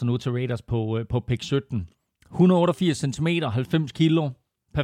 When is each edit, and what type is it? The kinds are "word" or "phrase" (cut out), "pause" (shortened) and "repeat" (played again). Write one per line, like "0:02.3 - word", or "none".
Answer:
none